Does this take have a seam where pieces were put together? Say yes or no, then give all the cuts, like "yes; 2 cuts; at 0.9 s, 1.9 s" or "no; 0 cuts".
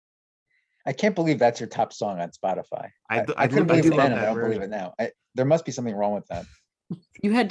no; 0 cuts